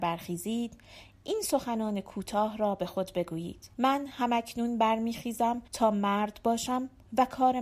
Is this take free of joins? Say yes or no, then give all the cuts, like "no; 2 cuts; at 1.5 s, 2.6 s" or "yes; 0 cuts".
no; 2 cuts; at 3.7 s, 5.7 s